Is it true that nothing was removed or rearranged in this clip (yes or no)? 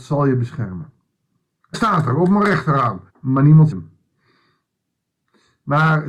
no